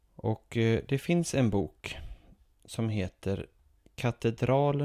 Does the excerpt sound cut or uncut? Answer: uncut